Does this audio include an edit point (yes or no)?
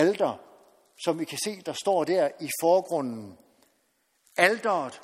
no